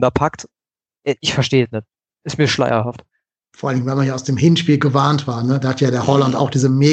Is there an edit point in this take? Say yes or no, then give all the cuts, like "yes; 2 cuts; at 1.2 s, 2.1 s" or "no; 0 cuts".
no; 0 cuts